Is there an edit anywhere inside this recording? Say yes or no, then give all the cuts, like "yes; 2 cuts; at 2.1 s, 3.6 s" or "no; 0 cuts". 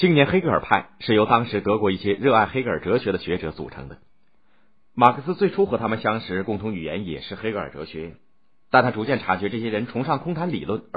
no; 0 cuts